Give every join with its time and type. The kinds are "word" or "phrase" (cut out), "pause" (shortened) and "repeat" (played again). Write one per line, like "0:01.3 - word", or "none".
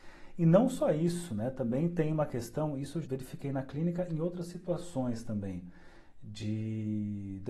0:03.0 - word